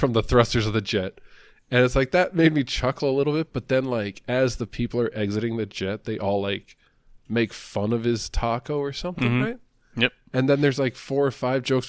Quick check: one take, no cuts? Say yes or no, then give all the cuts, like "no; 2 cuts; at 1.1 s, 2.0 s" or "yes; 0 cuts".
yes; 0 cuts